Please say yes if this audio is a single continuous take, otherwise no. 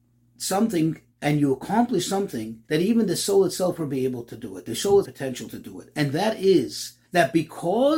no